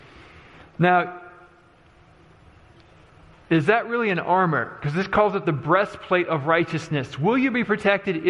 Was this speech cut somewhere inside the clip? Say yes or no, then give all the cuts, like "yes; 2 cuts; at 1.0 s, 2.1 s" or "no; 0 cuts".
no; 0 cuts